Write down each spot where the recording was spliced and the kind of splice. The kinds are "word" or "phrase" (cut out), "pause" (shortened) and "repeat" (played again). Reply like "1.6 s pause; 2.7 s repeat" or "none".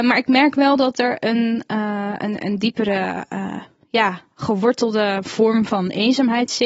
none